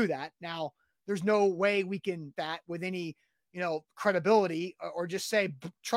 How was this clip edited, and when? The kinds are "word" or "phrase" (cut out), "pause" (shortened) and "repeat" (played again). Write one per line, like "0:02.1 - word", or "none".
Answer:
0:02.3 - word